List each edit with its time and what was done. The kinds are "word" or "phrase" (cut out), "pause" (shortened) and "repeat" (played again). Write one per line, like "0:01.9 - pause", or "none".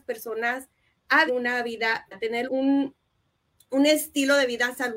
0:01.3 - word
0:02.1 - word
0:02.5 - word